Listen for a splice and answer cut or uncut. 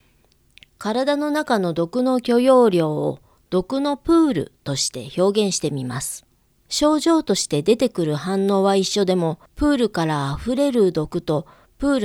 cut